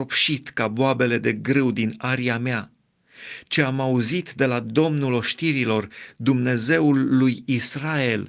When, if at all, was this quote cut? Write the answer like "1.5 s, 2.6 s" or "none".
none